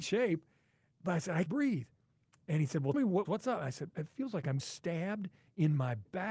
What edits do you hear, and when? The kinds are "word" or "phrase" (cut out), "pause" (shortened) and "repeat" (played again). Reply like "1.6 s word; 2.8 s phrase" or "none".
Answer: 1.5 s word; 2.9 s word; 3.2 s word; 3.9 s word; 4.6 s word